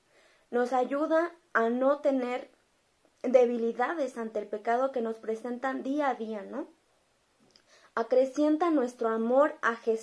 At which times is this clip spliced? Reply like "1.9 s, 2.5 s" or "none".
none